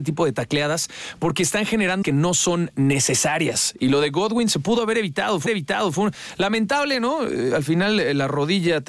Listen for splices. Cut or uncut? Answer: cut